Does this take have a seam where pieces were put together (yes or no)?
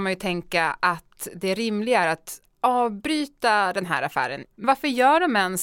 no